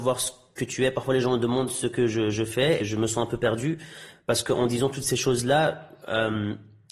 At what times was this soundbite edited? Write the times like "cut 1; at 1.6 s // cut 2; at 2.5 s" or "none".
cut 1; at 2.8 s